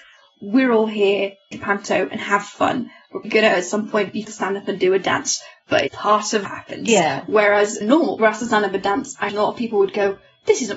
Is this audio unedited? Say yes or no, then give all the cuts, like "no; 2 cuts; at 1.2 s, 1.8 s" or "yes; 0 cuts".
no; 8 cuts; at 1.5 s, 3.2 s, 4.2 s, 5.9 s, 6.4 s, 7.8 s, 8.2 s, 9.3 s